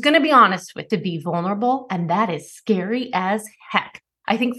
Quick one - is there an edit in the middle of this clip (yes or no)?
yes